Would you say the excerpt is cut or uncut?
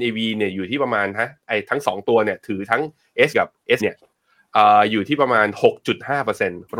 cut